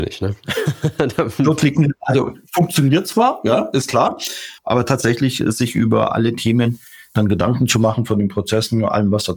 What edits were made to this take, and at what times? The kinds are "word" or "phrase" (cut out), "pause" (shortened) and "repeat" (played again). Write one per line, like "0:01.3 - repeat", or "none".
0:04.6 - pause